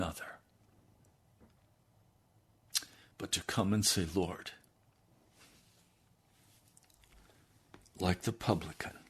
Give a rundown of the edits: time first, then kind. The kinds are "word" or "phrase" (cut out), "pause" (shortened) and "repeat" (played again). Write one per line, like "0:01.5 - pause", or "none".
none